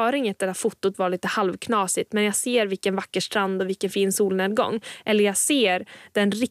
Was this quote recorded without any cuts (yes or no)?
yes